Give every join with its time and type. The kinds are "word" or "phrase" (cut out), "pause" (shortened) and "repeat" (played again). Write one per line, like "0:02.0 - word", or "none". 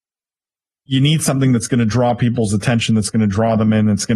none